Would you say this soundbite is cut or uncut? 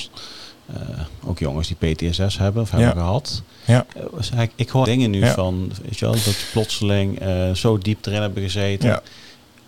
cut